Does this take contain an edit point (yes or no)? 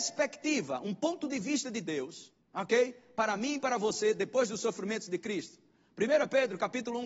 yes